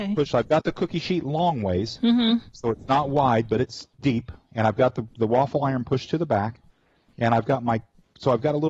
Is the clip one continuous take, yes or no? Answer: no